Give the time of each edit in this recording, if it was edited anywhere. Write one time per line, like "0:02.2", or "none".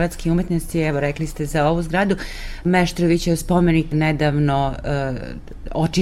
0:03.9